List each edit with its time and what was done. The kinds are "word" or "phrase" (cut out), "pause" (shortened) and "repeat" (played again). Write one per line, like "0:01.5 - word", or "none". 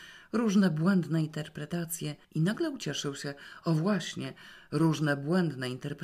0:02.2 - pause